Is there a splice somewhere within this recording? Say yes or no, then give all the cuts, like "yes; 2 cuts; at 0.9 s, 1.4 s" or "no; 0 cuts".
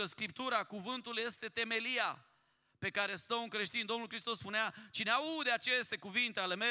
no; 0 cuts